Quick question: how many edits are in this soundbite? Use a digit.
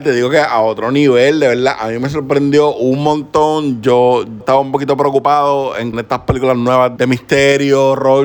3